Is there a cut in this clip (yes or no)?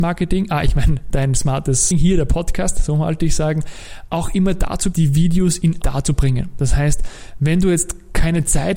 yes